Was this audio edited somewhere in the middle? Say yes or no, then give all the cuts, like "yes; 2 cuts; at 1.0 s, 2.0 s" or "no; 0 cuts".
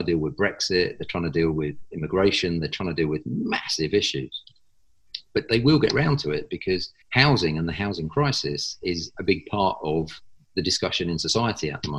yes; 1 cut; at 7.0 s